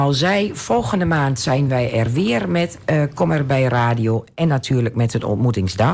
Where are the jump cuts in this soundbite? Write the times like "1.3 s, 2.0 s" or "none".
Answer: none